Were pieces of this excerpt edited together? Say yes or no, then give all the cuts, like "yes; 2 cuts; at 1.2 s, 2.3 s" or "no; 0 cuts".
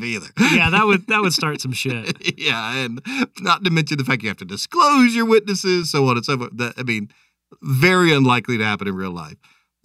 no; 0 cuts